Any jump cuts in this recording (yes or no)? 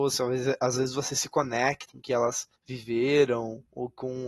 yes